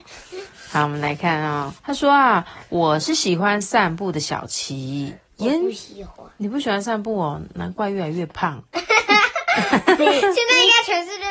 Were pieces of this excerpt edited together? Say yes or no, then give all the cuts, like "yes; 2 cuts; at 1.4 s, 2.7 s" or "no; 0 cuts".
yes; 2 cuts; at 1.8 s, 5.2 s